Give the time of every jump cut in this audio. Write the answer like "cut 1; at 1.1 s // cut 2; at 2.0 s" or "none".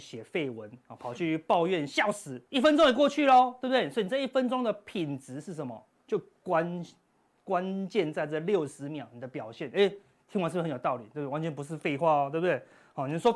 cut 1; at 2.4 s // cut 2; at 6.0 s